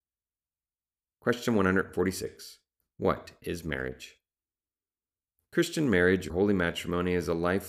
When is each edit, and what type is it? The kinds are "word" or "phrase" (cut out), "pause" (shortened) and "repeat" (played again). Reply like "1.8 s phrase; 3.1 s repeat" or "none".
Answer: 6.3 s word